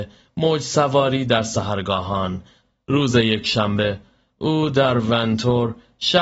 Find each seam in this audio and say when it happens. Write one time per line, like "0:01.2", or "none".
none